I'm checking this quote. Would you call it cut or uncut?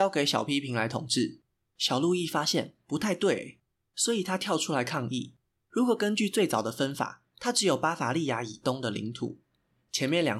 uncut